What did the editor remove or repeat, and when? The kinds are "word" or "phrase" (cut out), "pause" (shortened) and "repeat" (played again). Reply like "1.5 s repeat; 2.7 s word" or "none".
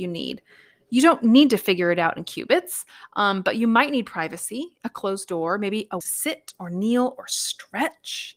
6.0 s phrase